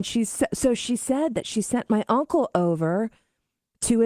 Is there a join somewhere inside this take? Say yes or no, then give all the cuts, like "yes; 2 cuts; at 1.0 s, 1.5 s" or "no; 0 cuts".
no; 0 cuts